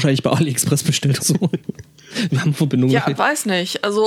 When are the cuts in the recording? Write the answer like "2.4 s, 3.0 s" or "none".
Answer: 1.2 s, 3.2 s